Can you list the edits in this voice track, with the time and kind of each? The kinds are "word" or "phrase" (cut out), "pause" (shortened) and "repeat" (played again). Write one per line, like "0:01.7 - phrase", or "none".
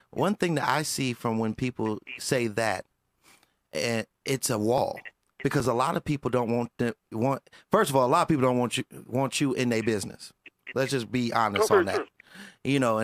none